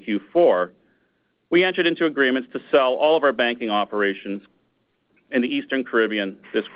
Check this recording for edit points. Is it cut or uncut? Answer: uncut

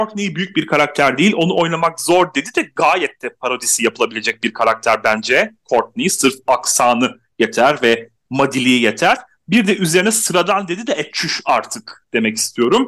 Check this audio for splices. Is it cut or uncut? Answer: uncut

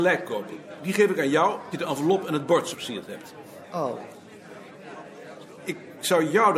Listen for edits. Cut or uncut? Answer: cut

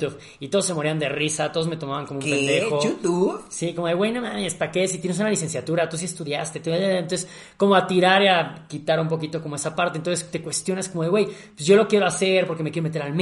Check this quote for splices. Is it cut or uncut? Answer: uncut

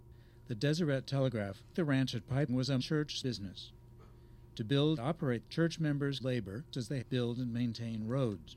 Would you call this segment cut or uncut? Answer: cut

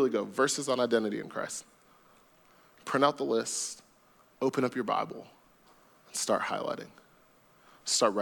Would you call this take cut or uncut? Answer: uncut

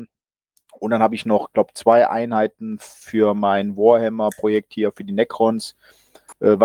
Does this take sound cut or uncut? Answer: uncut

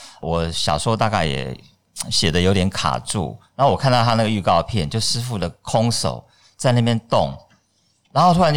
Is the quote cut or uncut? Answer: uncut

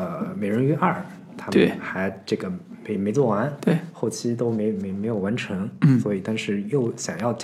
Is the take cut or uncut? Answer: uncut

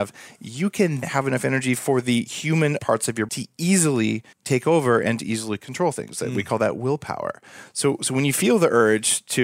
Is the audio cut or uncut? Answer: cut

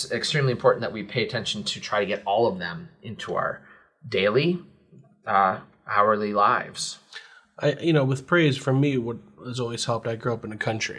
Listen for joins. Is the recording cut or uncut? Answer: uncut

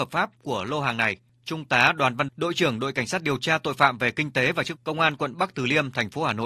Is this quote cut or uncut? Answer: cut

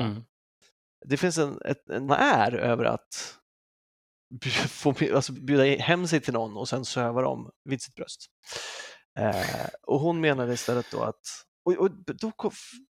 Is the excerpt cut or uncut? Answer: cut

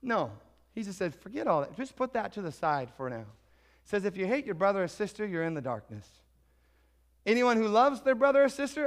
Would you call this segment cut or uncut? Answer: uncut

